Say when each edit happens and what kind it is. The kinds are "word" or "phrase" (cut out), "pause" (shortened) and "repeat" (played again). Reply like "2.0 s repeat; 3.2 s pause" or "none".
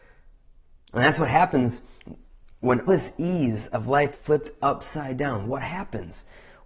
2.9 s word; 4.1 s word